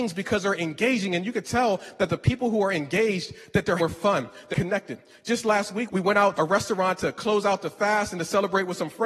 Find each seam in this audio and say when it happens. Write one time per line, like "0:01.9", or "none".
0:03.8
0:04.5
0:05.9
0:06.3